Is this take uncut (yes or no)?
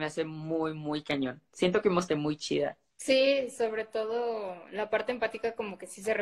no